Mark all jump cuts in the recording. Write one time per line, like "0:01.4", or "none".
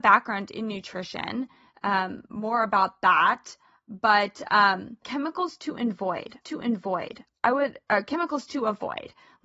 0:05.0
0:06.4